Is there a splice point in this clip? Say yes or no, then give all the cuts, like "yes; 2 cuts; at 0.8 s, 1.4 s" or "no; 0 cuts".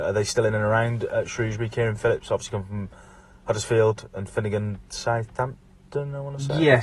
no; 0 cuts